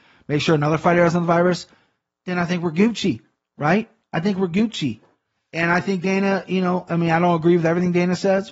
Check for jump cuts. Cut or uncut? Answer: uncut